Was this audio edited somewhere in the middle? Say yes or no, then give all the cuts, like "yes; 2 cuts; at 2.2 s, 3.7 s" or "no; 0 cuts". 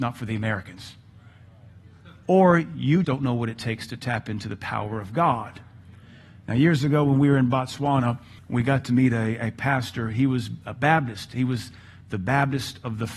yes; 1 cut; at 3.0 s